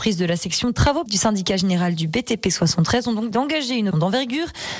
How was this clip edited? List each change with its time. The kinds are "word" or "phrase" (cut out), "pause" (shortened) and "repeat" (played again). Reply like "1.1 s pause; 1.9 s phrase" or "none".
1.1 s word; 3.3 s word; 3.9 s word